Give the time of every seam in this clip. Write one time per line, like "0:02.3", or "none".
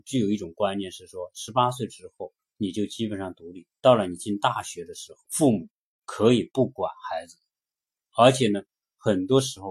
0:02.4
0:03.8
0:05.2